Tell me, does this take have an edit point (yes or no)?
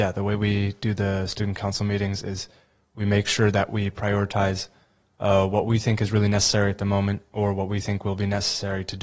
no